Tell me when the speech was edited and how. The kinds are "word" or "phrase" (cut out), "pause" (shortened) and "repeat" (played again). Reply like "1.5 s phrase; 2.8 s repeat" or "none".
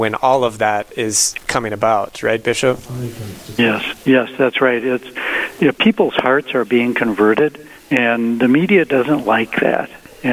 4.0 s pause; 7.8 s pause